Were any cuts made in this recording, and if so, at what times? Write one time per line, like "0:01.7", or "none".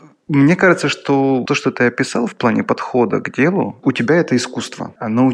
0:01.4
0:03.8